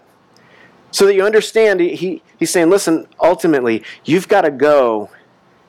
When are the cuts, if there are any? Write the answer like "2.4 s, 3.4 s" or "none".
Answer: none